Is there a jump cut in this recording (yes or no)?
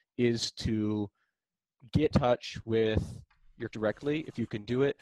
yes